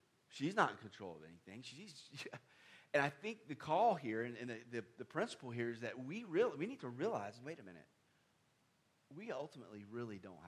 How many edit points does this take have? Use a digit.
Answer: 0